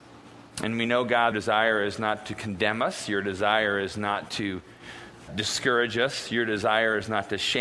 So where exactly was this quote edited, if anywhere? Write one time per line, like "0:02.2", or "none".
0:01.3
0:05.3